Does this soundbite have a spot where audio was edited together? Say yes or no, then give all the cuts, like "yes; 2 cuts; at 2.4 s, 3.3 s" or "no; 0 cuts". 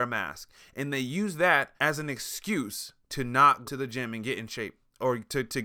yes; 3 cuts; at 1.8 s, 3.0 s, 3.6 s